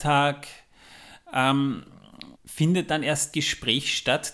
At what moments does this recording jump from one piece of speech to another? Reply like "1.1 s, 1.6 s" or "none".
2.4 s, 3.3 s